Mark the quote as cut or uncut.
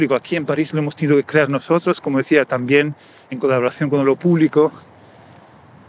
uncut